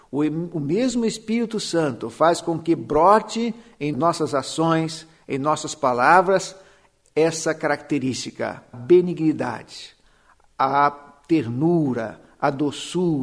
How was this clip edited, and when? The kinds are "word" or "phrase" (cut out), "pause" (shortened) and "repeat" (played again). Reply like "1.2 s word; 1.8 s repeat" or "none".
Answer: 3.9 s phrase; 8.7 s word